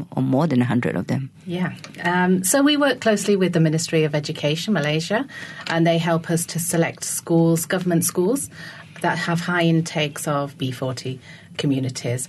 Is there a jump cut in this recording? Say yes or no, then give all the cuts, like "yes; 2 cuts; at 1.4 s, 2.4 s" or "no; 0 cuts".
no; 0 cuts